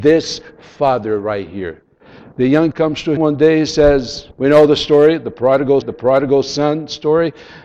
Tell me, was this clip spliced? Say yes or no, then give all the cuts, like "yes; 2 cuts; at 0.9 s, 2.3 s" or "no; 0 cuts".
yes; 4 cuts; at 2.7 s, 3.2 s, 4.3 s, 5.8 s